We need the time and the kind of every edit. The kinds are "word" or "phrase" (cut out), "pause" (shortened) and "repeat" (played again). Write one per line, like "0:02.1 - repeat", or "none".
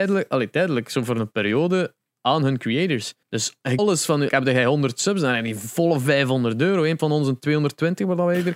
0:03.2 - pause
0:03.8 - phrase
0:04.3 - word
0:07.0 - word